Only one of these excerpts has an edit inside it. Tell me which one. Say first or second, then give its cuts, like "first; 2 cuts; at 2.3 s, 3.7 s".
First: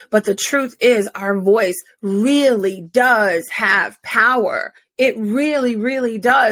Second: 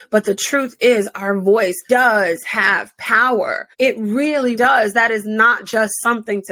second; 3 cuts; at 1.9 s, 3.7 s, 4.5 s